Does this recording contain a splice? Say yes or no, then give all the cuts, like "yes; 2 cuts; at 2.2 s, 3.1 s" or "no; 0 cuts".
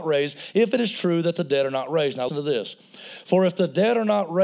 yes; 1 cut; at 2.3 s